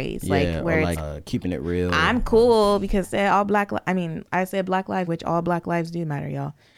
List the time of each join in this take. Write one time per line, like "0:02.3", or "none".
0:01.0
0:03.0
0:05.1